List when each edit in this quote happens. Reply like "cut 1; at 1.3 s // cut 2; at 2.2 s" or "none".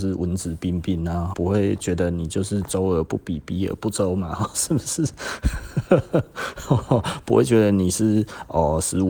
cut 1; at 1.3 s // cut 2; at 4.5 s